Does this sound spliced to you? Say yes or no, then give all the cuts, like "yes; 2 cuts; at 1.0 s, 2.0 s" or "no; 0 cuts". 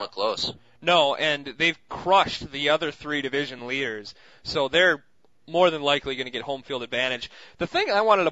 no; 0 cuts